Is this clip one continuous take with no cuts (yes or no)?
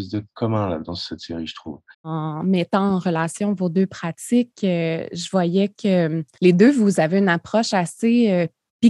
no